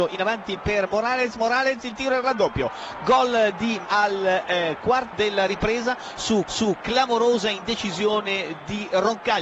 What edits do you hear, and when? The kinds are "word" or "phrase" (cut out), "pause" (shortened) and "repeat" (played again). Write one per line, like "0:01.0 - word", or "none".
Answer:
0:01.3 - word
0:03.8 - word
0:05.1 - word
0:06.5 - repeat